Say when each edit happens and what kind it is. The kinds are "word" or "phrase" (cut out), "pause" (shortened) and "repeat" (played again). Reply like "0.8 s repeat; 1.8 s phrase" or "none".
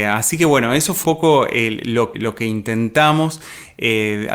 1.0 s word; 2.1 s word